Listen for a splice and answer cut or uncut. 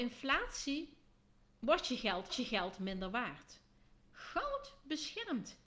cut